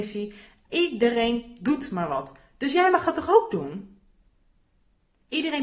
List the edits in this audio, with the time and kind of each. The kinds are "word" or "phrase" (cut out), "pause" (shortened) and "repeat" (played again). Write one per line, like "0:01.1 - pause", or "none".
none